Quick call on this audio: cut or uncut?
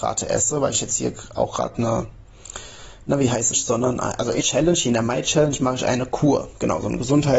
cut